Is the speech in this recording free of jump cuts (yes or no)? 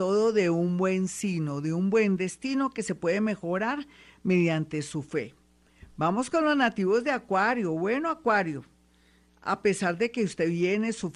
yes